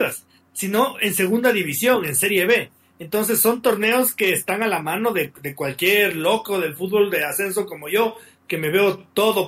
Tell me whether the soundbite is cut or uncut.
uncut